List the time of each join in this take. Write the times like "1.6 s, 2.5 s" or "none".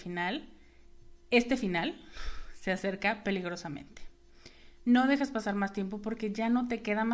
none